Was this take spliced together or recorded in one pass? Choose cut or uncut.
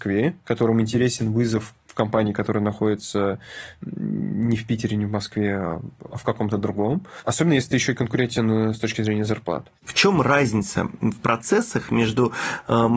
cut